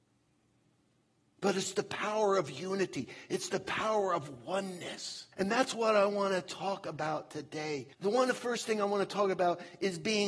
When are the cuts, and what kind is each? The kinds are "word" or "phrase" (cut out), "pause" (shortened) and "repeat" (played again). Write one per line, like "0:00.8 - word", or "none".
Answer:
0:05.3 - pause
0:07.9 - pause

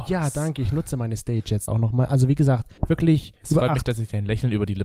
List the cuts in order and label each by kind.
0:01.7 - word
0:02.8 - pause

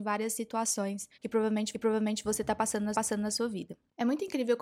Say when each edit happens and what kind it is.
0:01.1 - pause
0:01.7 - repeat
0:02.9 - repeat

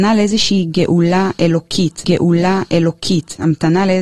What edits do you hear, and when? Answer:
0:02.0 - repeat

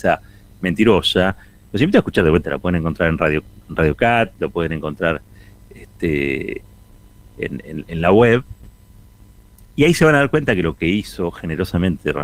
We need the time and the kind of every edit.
0:02.4 - phrase

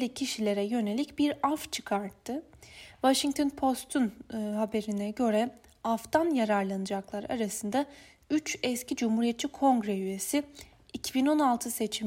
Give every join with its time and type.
none

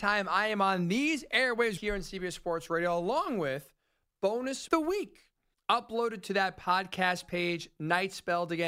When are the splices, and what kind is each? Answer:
0:01.8 - word
0:04.7 - phrase
0:05.5 - pause

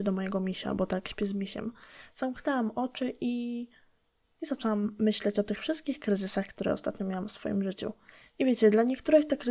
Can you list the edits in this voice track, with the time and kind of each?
none

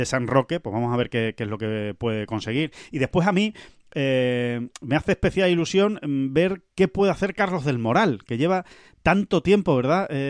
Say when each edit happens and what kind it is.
none

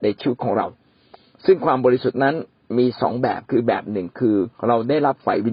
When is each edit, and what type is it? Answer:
0:04.6 - pause

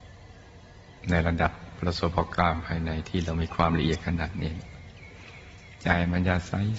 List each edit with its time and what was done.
0:01.0 - pause

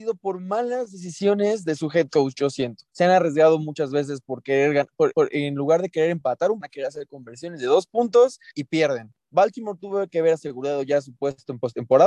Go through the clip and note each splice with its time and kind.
0:02.9 - pause
0:05.1 - repeat
0:06.6 - phrase
0:08.5 - phrase
0:09.2 - pause

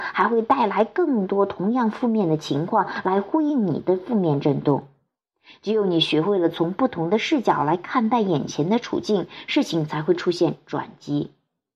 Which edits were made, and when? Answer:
none

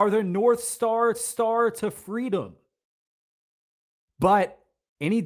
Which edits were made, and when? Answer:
0:01.1 - repeat

